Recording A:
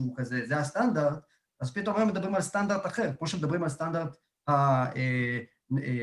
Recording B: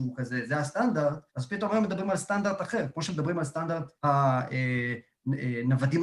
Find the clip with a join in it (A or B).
B